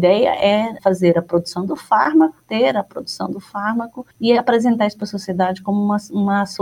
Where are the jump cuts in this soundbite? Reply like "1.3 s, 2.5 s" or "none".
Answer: 4.1 s